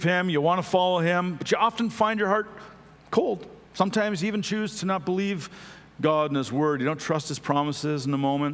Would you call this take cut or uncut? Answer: cut